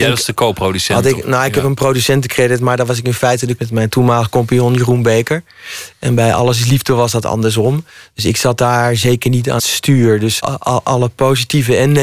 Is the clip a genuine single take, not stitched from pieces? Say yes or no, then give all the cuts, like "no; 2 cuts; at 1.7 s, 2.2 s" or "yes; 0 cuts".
no; 3 cuts; at 3.6 s, 9.6 s, 10.4 s